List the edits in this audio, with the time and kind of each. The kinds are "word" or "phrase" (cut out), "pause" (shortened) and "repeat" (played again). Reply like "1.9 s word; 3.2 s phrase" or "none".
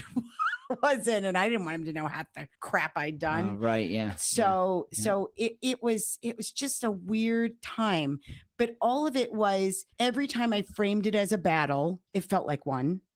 2.5 s pause; 9.9 s pause; 12.1 s pause